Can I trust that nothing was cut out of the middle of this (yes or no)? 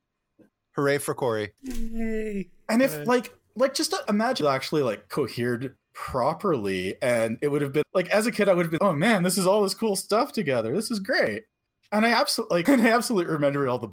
no